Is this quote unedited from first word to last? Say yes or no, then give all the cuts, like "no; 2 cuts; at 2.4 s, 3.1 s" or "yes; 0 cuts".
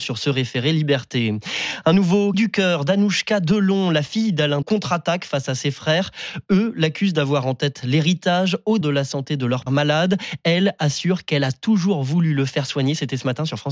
no; 4 cuts; at 2.3 s, 4.6 s, 8.8 s, 9.7 s